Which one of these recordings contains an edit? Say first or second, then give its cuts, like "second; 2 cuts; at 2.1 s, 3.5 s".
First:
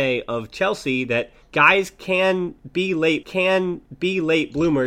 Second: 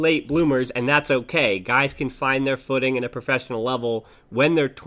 first; 2 cuts; at 1.4 s, 3.2 s